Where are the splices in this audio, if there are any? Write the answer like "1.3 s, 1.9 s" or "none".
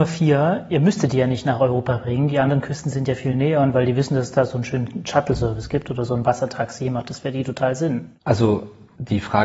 none